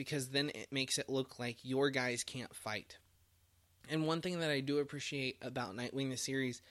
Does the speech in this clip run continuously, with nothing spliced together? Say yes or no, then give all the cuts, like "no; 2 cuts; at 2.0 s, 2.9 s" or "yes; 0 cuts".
yes; 0 cuts